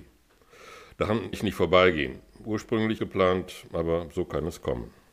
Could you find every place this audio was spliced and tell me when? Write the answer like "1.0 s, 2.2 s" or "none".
1.3 s, 3.0 s